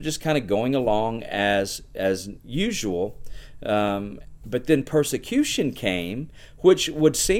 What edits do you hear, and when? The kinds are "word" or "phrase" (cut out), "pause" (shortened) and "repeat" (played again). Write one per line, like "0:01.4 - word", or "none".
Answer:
none